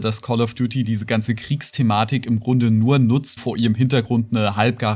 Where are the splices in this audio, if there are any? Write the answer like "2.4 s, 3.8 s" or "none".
3.4 s

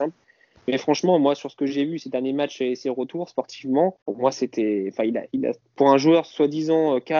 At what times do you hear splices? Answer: 4.0 s

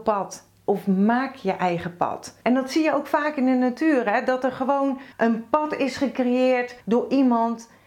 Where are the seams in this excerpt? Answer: 2.4 s, 5.1 s, 6.8 s

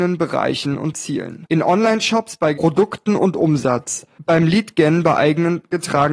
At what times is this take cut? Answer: 2.5 s

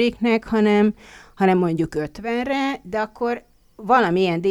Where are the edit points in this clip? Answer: none

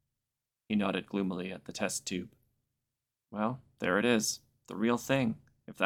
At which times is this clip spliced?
none

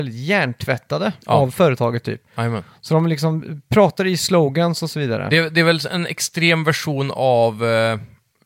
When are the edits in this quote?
1.2 s

